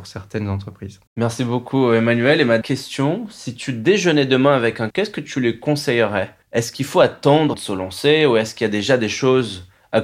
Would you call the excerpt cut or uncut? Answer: cut